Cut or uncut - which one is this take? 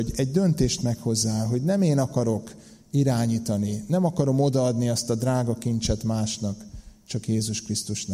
uncut